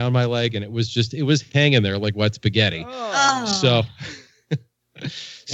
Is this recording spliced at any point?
no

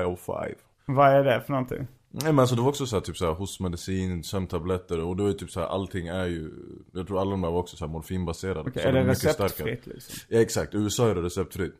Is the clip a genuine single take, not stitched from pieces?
yes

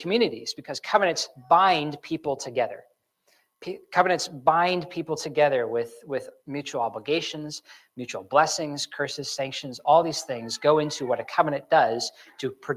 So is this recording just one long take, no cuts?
yes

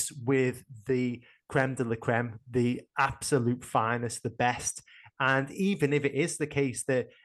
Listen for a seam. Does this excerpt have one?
no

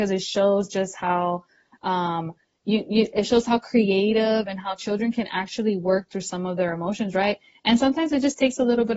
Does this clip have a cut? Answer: no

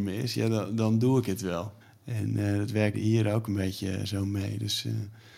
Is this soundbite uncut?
no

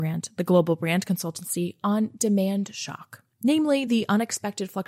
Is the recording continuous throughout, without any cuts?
yes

